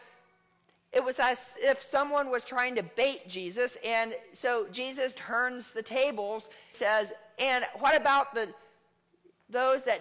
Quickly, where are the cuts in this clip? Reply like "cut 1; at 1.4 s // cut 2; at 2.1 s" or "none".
cut 1; at 5.2 s // cut 2; at 6.7 s